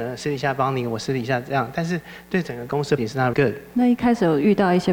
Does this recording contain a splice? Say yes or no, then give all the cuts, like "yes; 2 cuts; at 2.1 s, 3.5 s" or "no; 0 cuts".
yes; 2 cuts; at 3.0 s, 3.3 s